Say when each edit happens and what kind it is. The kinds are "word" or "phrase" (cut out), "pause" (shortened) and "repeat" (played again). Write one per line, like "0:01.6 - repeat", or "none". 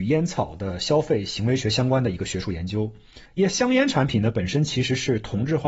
0:03.3 - pause